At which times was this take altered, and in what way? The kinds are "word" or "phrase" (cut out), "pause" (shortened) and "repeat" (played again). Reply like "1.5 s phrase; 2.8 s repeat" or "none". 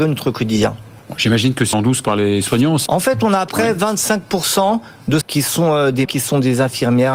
1.7 s word; 2.9 s word; 3.5 s word; 5.2 s word; 6.0 s word